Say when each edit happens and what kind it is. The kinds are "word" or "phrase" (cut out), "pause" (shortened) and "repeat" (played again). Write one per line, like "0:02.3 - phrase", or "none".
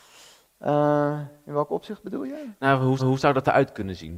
0:03.0 - repeat